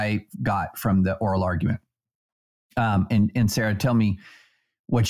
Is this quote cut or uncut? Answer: uncut